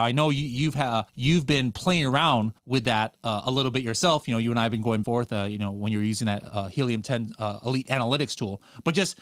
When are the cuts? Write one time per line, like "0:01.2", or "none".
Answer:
0:01.1
0:02.6
0:05.0